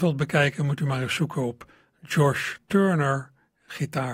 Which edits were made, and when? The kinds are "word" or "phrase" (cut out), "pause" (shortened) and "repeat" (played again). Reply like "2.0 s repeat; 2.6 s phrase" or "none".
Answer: none

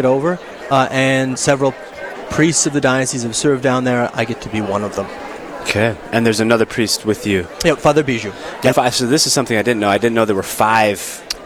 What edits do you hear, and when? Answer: 1.4 s word; 8.7 s word

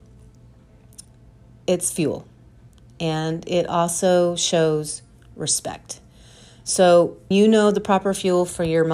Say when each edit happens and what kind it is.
7.3 s word

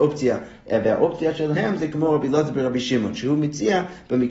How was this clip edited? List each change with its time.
none

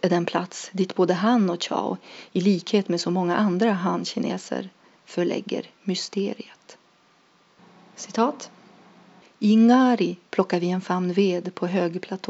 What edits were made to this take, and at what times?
none

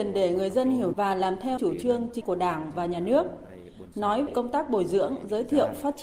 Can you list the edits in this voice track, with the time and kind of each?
0.9 s word; 1.6 s word; 2.2 s word; 4.3 s word

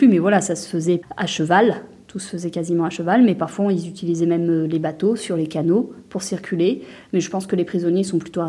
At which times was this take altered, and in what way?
none

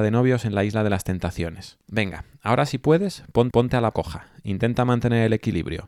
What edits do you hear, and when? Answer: 1.8 s pause; 3.5 s repeat; 3.9 s word

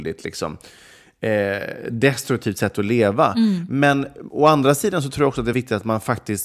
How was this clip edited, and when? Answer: 5.5 s word

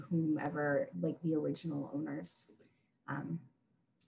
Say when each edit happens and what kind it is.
0.9 s word

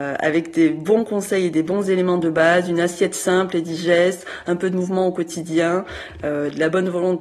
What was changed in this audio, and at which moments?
none

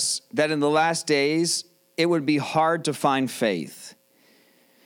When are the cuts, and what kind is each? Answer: none

